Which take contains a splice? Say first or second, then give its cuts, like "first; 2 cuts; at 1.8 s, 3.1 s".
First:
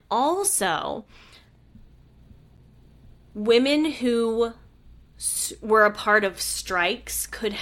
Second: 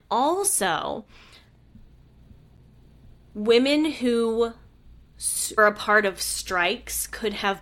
second; 1 cut; at 5.6 s